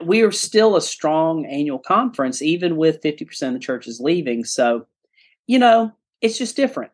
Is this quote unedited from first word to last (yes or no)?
yes